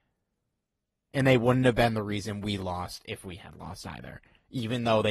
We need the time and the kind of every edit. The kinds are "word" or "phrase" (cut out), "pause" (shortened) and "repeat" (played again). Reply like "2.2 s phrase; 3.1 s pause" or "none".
none